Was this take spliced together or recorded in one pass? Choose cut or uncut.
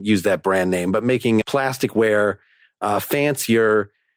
cut